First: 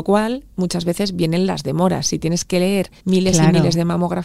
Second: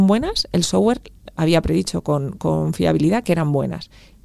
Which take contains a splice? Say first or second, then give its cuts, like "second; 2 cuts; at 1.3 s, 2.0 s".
first; 1 cut; at 3.0 s